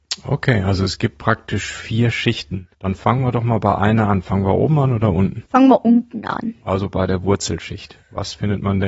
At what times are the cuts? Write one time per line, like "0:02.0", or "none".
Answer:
0:02.7
0:05.5